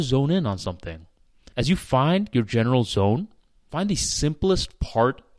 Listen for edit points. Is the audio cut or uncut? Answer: uncut